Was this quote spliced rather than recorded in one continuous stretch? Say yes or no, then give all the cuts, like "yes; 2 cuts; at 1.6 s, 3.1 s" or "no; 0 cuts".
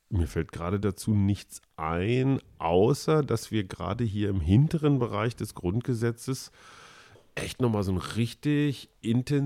no; 0 cuts